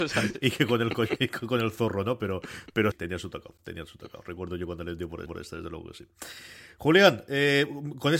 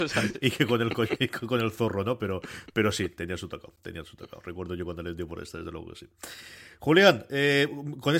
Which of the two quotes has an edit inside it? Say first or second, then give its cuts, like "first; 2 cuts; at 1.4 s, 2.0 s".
first; 2 cuts; at 2.9 s, 5.3 s